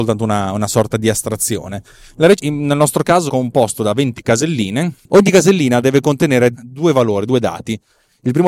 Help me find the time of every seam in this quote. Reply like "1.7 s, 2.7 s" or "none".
2.4 s, 3.3 s, 6.5 s